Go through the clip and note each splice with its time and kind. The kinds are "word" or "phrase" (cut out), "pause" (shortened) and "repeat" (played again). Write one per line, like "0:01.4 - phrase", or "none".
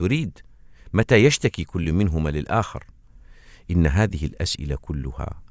none